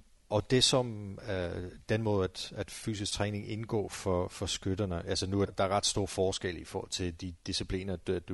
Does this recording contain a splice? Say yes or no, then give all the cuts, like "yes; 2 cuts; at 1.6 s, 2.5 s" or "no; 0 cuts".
yes; 1 cut; at 5.5 s